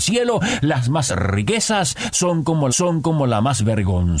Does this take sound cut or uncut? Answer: cut